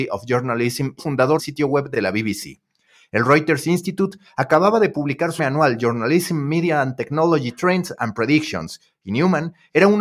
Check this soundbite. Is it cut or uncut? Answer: cut